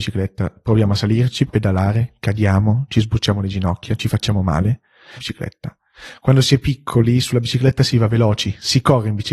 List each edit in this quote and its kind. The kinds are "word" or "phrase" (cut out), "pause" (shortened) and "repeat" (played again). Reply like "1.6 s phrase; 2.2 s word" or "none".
1.5 s word; 5.2 s phrase